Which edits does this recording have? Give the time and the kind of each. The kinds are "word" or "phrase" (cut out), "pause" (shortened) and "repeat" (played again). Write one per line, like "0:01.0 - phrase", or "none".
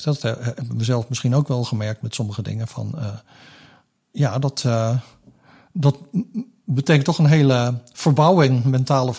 none